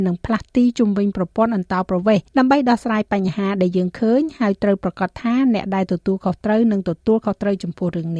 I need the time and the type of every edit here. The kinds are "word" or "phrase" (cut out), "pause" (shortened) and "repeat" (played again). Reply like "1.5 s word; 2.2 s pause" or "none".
2.3 s pause